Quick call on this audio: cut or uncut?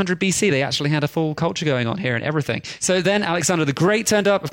uncut